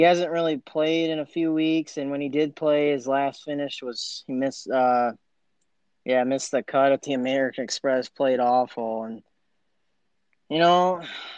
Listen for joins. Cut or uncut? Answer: uncut